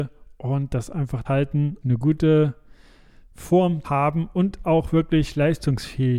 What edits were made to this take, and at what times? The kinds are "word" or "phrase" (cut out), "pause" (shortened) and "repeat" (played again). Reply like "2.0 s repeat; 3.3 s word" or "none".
1.2 s word; 1.8 s word; 3.8 s word